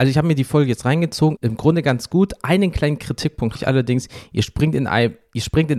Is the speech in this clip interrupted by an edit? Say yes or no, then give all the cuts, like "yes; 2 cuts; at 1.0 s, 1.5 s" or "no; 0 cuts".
yes; 2 cuts; at 1.4 s, 3.6 s